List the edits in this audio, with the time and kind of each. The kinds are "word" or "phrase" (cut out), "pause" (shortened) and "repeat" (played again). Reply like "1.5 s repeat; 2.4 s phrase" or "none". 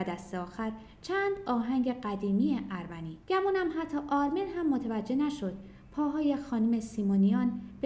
3.2 s pause